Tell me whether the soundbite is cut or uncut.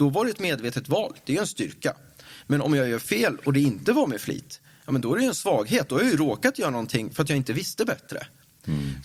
uncut